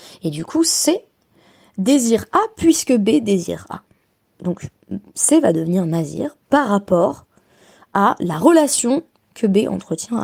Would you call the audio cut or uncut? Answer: uncut